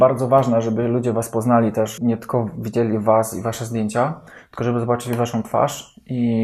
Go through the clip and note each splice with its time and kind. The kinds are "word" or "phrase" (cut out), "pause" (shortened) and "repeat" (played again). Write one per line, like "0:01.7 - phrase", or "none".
0:02.0 - word